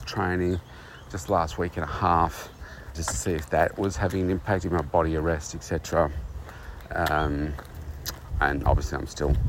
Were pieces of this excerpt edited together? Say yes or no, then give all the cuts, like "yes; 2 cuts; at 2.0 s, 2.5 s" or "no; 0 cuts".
yes; 2 cuts; at 2.9 s, 4.6 s